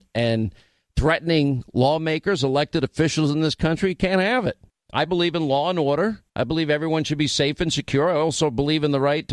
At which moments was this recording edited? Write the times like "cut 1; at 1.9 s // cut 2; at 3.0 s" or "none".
cut 1; at 4.7 s // cut 2; at 6.3 s

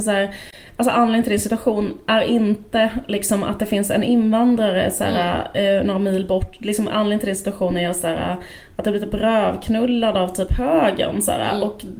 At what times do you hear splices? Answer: none

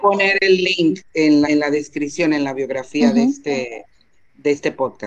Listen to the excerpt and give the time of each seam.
cut 1; at 1.4 s

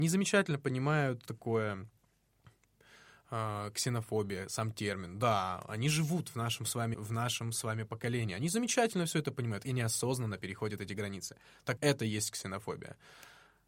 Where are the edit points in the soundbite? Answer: cut 1; at 1.3 s // cut 2; at 6.9 s // cut 3; at 11.8 s

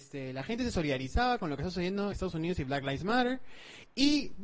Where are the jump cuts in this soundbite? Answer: cut 1; at 2.1 s

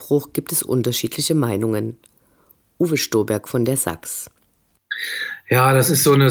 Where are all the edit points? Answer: none

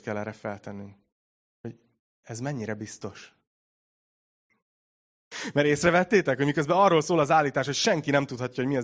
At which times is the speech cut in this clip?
none

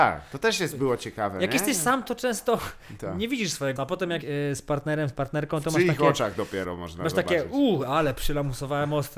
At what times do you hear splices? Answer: cut 1; at 3.8 s // cut 2; at 4.2 s

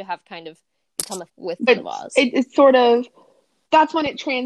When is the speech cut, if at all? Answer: cut 1; at 1.3 s // cut 2; at 1.7 s

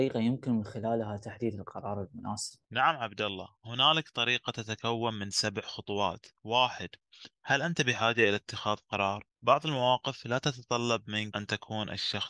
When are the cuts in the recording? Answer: cut 1; at 2.6 s // cut 2; at 9.3 s

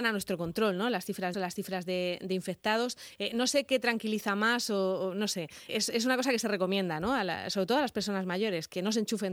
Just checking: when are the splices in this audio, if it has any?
cut 1; at 1.3 s // cut 2; at 5.7 s

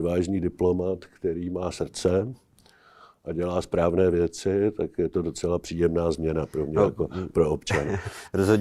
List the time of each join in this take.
none

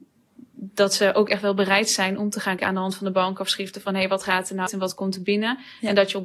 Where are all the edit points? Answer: cut 1; at 2.6 s // cut 2; at 4.7 s

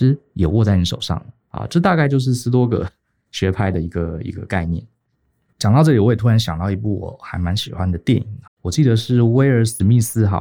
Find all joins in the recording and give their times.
cut 1; at 8.5 s

